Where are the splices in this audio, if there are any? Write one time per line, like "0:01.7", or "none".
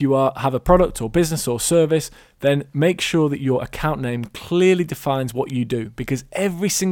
none

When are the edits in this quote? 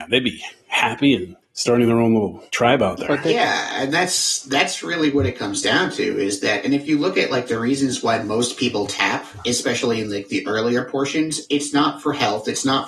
0:01.4
0:02.5

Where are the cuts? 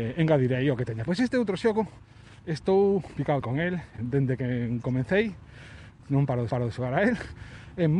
0:01.1
0:02.4
0:03.4
0:04.0
0:06.5

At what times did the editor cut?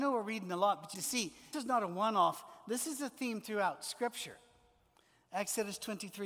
0:00.9
0:01.5

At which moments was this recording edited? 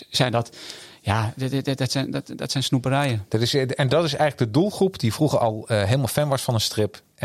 none

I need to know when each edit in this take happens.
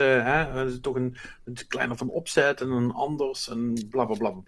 none

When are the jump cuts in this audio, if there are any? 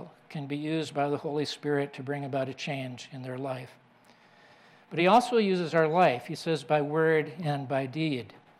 none

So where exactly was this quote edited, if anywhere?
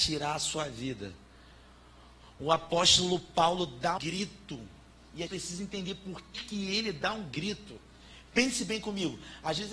0:04.0
0:05.3
0:06.3

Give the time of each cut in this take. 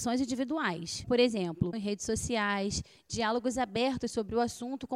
0:01.0
0:01.7

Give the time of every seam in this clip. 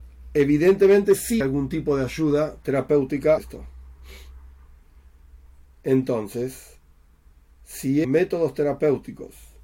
0:01.4
0:03.4
0:08.0

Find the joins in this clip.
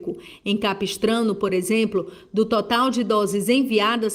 none

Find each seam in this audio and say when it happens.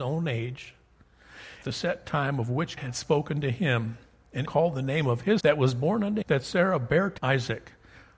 0:01.6
0:02.8
0:04.4
0:05.4
0:06.2
0:07.2

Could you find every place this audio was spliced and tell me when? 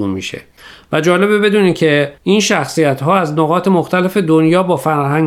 0:02.2

